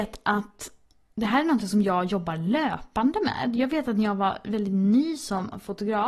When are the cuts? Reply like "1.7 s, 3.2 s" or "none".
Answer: none